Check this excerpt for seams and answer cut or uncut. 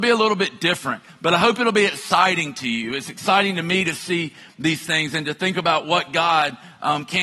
uncut